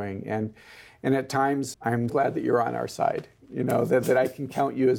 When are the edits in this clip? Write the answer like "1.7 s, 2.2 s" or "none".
1.7 s, 2.1 s